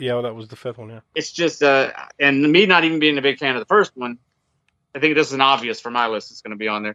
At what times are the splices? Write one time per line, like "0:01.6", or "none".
0:01.1
0:04.7